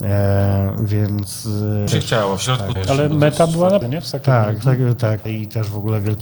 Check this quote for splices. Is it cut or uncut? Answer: cut